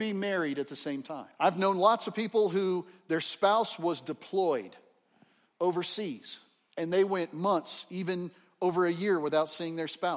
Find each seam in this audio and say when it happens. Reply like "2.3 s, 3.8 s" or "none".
1.3 s